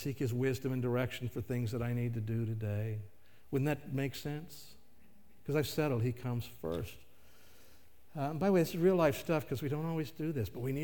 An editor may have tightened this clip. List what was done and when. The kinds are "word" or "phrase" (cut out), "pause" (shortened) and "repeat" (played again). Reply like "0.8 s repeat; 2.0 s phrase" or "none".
none